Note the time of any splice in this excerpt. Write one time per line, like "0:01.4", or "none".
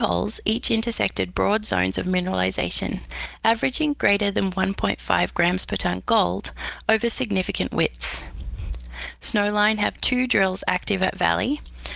none